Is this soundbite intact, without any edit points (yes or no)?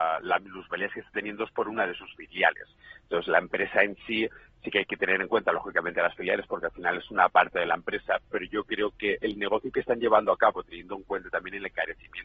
yes